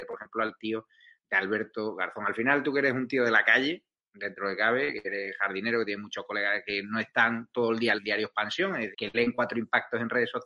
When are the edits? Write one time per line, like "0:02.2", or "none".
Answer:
0:07.9
0:08.9